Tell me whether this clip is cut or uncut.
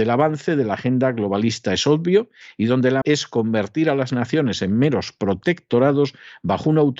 cut